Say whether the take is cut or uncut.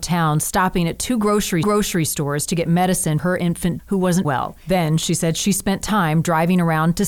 cut